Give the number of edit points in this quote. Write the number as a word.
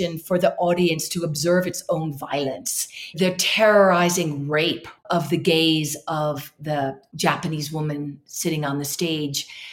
one